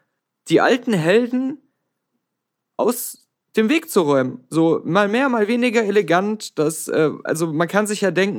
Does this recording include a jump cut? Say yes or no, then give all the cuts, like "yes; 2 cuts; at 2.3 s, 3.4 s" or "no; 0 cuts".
no; 0 cuts